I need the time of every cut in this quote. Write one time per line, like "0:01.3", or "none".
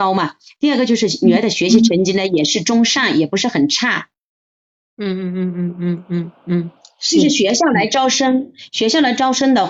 none